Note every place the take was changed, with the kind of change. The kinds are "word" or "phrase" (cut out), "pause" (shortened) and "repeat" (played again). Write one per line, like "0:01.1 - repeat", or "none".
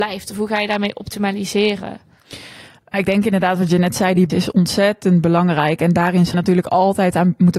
0:02.9 - word
0:04.3 - word
0:06.3 - word